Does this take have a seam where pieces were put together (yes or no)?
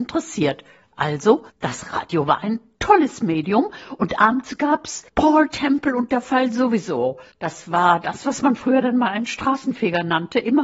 yes